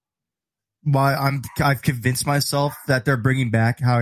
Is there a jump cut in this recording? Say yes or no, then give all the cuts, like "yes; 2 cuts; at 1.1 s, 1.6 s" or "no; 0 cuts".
no; 0 cuts